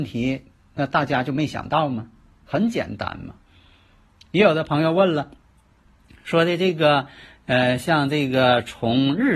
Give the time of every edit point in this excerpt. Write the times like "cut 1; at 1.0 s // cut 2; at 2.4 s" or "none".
none